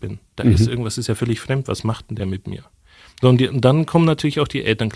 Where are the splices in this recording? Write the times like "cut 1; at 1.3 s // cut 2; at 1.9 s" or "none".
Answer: none